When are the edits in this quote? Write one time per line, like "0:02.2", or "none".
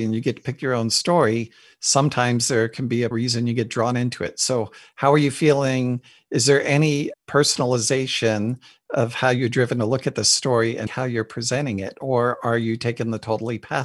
0:03.1
0:07.1
0:10.9